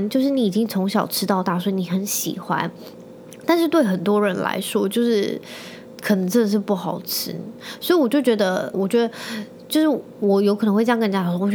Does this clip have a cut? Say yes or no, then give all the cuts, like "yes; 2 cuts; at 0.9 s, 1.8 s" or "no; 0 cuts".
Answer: yes; 1 cut; at 8.7 s